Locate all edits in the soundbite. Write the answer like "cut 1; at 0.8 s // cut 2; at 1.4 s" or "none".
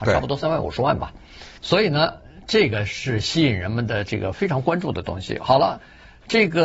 cut 1; at 1.6 s